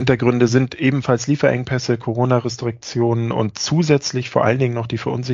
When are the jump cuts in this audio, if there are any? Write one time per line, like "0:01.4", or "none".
none